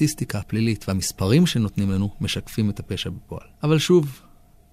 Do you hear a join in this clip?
yes; 1 cut; at 3.5 s

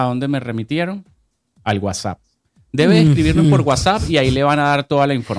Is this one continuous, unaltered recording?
yes; 0 cuts

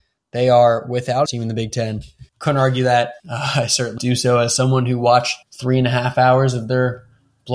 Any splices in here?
yes; 5 cuts; at 1.3 s, 2.3 s, 3.2 s, 4.0 s, 5.4 s

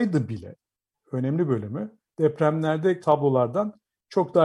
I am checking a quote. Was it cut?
yes; 1 cut; at 3.0 s

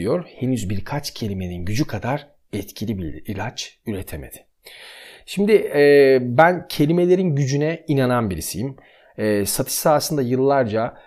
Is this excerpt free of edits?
yes; 0 cuts

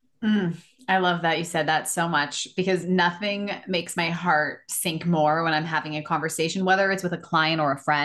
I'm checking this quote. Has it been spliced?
no; 0 cuts

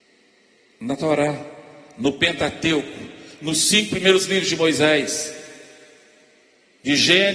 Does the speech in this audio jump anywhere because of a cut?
no; 0 cuts

